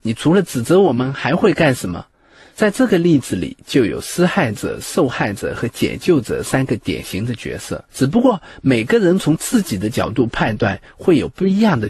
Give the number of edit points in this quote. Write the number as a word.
two